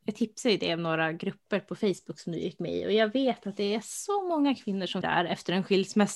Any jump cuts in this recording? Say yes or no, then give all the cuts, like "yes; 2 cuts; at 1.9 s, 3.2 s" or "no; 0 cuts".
yes; 1 cut; at 5.0 s